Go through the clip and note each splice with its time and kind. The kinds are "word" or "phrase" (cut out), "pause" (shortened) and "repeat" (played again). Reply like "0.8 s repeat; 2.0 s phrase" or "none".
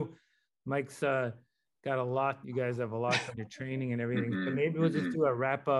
2.4 s phrase; 3.4 s phrase

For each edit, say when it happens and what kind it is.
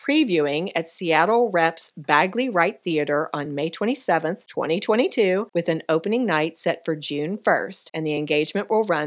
none

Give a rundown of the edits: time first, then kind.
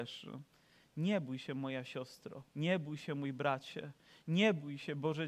2.5 s pause

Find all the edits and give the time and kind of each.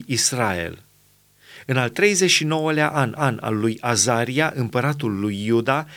3.2 s repeat

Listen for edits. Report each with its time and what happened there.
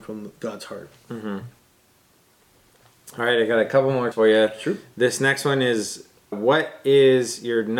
4.1 s word; 6.3 s word

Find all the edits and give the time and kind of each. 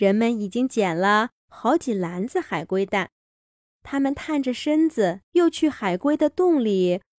3.4 s pause; 5.2 s pause

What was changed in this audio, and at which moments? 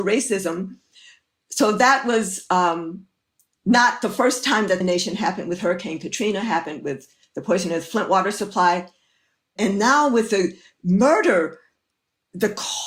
4.8 s phrase

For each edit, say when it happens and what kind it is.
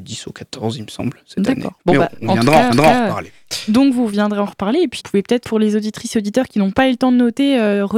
1.8 s pause; 2.7 s repeat; 5.0 s word; 5.4 s word

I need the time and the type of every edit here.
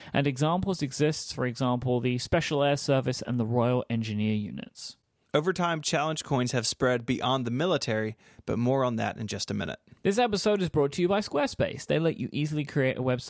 none

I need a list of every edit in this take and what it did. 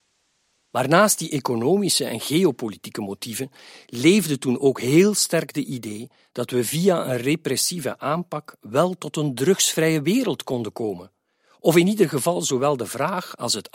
none

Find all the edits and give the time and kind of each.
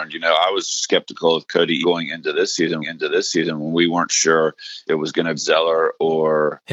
1.8 s word; 2.8 s repeat; 4.9 s word; 5.4 s word

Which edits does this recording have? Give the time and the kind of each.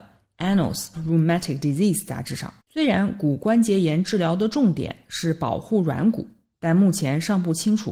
0.9 s word; 2.6 s pause

